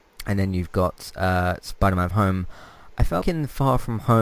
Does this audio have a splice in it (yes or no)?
yes